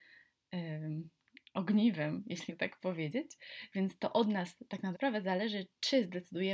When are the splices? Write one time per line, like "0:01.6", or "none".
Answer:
0:02.5
0:04.9